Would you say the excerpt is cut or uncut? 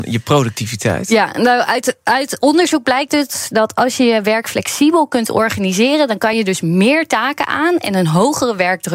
uncut